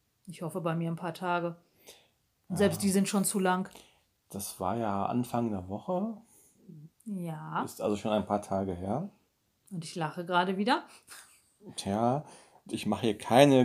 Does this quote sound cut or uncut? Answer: uncut